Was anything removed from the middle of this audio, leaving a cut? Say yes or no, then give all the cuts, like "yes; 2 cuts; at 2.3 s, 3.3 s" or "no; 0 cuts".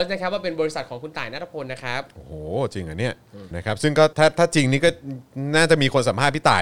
yes; 2 cuts; at 3.5 s, 4.1 s